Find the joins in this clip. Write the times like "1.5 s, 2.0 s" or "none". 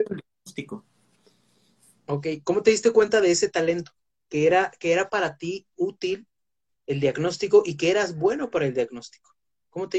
none